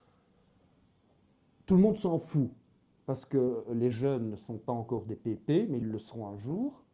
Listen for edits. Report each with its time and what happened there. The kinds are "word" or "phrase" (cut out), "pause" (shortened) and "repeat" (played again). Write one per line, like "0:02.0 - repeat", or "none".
none